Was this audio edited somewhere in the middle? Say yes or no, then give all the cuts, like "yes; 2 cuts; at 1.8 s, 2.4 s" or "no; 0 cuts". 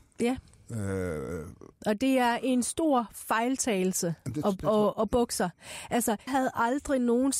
yes; 3 cuts; at 1.7 s, 4.9 s, 6.3 s